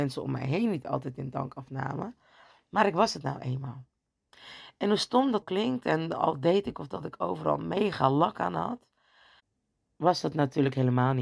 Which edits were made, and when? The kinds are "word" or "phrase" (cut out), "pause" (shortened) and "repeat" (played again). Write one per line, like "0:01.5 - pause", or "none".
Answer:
0:05.4 - word